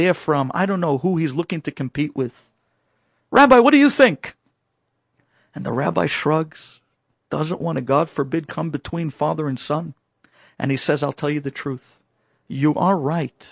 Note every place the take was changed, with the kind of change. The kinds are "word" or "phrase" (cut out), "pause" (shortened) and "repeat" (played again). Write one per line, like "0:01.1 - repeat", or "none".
none